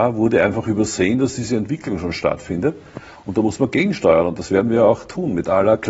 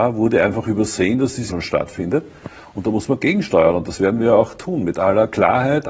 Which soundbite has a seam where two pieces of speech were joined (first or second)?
second